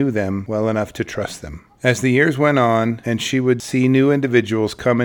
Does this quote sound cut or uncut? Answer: cut